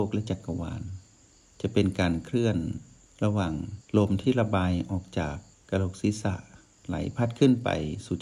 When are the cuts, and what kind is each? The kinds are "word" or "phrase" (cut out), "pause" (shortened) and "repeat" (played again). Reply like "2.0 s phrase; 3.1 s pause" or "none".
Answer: 3.9 s pause